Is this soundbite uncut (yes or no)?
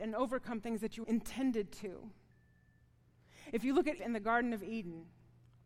no